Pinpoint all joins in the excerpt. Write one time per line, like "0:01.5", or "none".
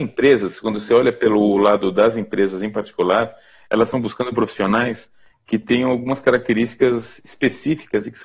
none